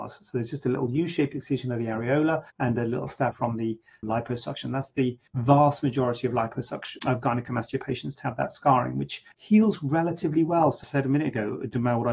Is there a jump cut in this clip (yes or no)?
yes